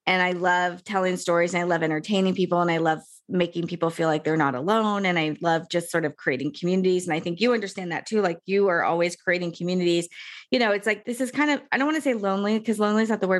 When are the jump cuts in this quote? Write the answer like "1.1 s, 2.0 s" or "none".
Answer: none